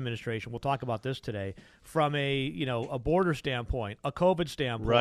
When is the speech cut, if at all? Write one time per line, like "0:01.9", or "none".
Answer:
none